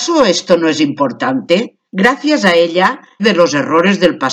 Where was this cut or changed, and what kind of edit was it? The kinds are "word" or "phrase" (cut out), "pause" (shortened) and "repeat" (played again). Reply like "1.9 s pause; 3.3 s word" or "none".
1.9 s pause; 3.2 s phrase